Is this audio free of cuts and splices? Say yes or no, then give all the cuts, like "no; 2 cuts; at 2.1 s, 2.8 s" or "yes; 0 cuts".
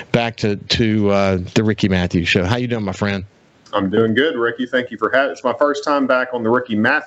yes; 0 cuts